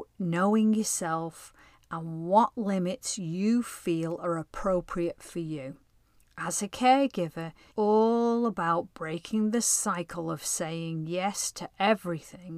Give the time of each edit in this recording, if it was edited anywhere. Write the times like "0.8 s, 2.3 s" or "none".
7.7 s